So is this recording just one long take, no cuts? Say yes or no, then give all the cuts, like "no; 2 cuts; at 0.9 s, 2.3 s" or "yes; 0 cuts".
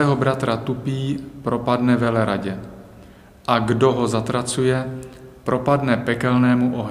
yes; 0 cuts